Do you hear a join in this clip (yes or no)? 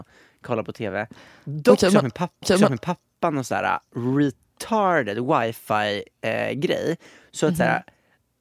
yes